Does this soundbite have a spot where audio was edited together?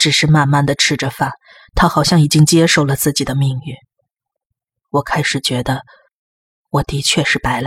no; 0 cuts

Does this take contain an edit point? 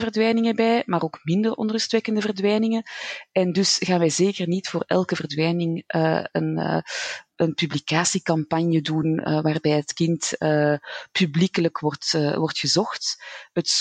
no; 0 cuts

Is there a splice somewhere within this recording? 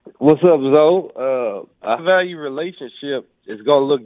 yes; 1 cut; at 2.0 s

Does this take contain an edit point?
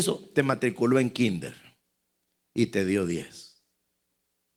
no; 0 cuts

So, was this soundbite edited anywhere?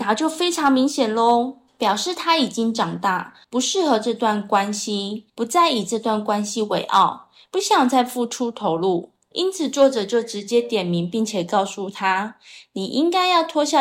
yes; 2 cuts; at 3.4 s, 5.3 s

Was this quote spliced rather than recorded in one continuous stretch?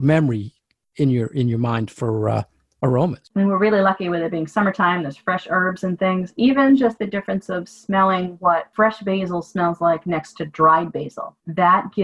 no; 0 cuts

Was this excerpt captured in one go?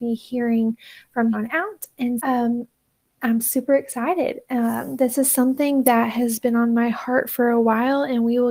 no; 2 cuts; at 1.3 s, 2.2 s

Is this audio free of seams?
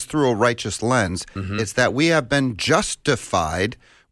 yes; 0 cuts

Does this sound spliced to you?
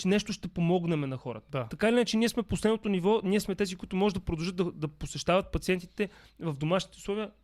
no; 0 cuts

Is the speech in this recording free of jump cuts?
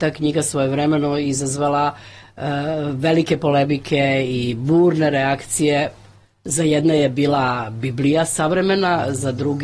yes; 0 cuts

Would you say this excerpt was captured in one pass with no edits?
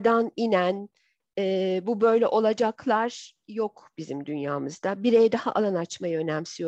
yes; 0 cuts

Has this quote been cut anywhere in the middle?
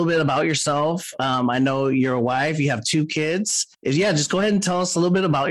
yes; 1 cut; at 3.7 s

